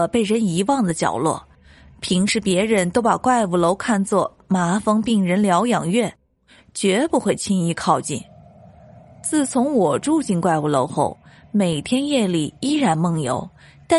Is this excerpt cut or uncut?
uncut